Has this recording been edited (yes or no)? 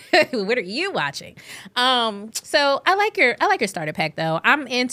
no